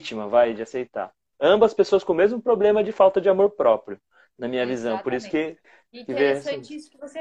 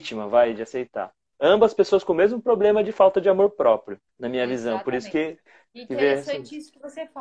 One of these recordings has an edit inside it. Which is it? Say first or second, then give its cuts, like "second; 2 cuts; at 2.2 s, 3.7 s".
second; 1 cut; at 4.1 s